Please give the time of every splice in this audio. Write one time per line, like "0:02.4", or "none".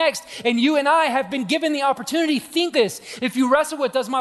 0:02.7